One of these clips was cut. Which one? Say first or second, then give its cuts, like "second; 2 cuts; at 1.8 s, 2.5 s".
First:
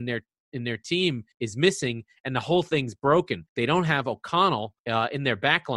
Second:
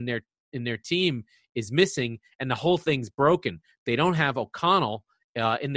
first; 3 cuts; at 1.3 s, 3.5 s, 4.8 s